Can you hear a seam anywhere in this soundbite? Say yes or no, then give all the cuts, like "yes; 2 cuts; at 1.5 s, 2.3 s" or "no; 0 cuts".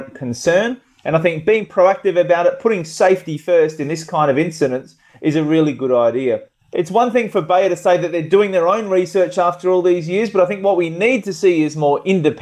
no; 0 cuts